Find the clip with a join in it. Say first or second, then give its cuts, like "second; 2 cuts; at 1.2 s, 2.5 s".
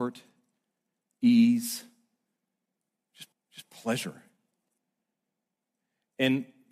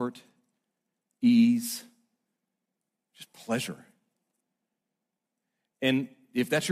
first; 1 cut; at 3.3 s